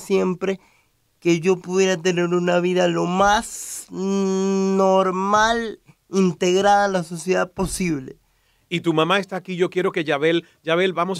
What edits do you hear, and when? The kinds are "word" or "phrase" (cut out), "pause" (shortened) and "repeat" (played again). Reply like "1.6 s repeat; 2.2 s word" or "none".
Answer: none